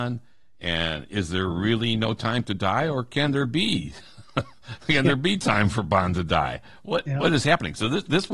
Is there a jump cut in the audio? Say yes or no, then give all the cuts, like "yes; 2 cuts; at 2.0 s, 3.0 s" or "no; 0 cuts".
no; 0 cuts